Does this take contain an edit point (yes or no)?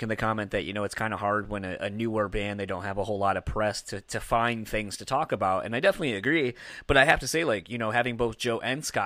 no